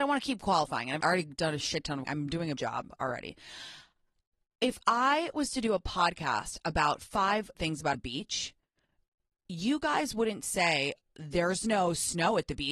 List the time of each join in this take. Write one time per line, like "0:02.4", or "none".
0:01.0
0:02.1
0:02.6
0:07.5
0:07.9
0:11.1